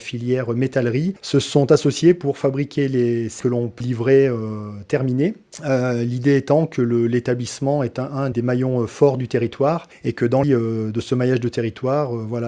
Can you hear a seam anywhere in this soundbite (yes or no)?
yes